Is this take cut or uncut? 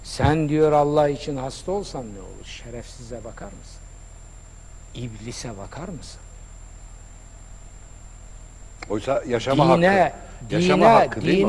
uncut